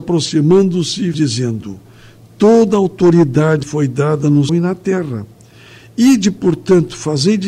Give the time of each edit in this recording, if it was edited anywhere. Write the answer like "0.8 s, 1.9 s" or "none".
1.1 s, 3.6 s, 4.5 s